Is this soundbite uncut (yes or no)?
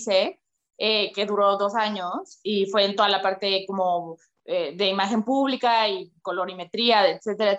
yes